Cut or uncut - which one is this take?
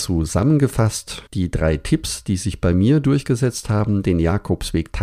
cut